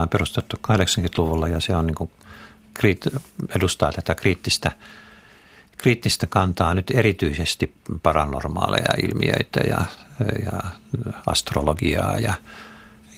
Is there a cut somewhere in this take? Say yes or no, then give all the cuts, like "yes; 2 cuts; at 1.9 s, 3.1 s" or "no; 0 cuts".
no; 0 cuts